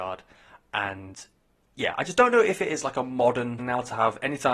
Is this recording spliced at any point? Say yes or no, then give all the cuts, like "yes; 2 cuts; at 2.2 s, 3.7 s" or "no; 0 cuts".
yes; 1 cut; at 3.6 s